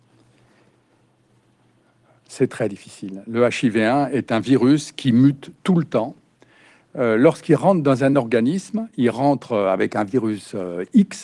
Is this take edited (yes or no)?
no